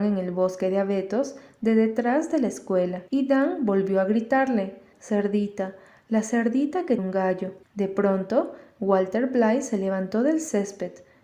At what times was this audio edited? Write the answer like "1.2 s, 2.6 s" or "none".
3.1 s, 4.9 s, 7.0 s, 7.6 s